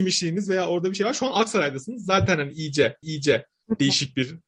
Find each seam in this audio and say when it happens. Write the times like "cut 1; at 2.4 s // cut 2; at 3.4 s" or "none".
cut 1; at 3.0 s